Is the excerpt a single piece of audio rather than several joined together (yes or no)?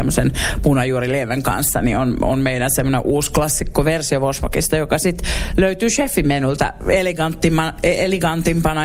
yes